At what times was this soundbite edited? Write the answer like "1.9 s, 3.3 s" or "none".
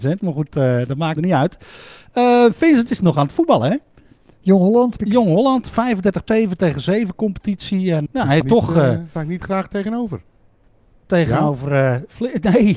1.2 s, 3.0 s, 5.0 s, 6.3 s, 8.1 s, 8.4 s, 9.1 s